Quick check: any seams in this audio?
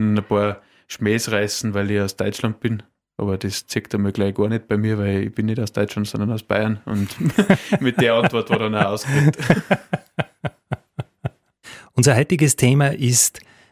no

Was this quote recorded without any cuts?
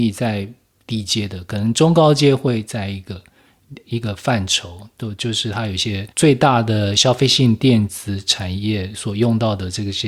no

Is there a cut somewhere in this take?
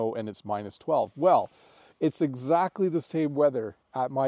no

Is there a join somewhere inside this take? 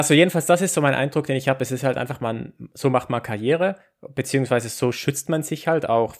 no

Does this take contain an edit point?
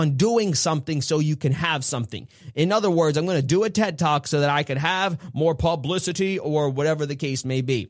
no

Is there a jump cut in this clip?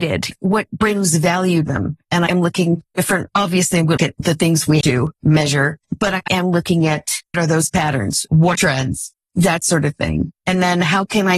yes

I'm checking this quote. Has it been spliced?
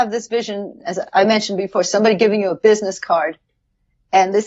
no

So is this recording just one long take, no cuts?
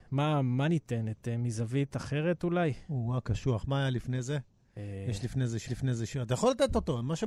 no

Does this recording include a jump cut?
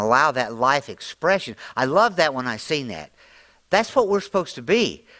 no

